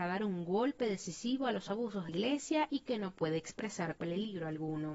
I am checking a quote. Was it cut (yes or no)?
yes